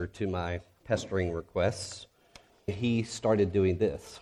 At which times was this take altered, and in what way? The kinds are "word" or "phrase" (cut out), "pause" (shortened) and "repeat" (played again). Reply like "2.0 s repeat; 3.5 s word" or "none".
2.7 s word